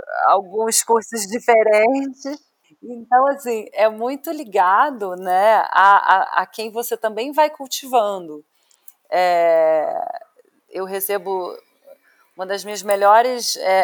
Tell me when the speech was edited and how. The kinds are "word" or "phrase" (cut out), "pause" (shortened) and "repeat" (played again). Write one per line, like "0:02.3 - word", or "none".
0:10.6 - word